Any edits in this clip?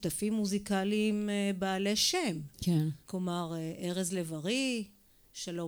yes; 1 cut; at 3.0 s

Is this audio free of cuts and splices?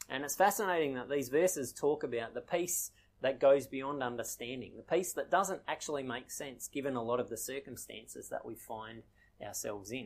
yes; 0 cuts

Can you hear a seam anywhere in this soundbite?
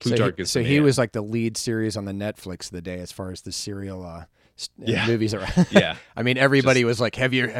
no; 0 cuts

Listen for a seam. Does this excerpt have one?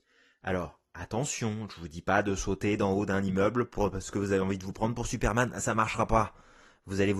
no; 0 cuts

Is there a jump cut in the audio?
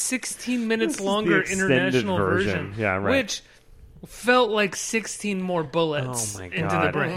no; 0 cuts

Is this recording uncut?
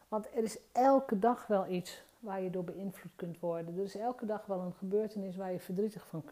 yes; 0 cuts

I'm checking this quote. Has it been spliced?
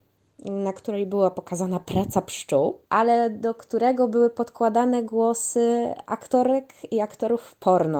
yes; 1 cut; at 2.8 s

